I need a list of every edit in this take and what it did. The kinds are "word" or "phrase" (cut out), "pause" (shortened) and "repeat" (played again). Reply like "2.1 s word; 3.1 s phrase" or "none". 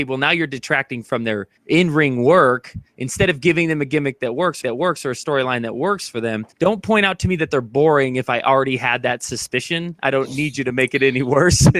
1.6 s pause; 4.6 s repeat; 6.5 s pause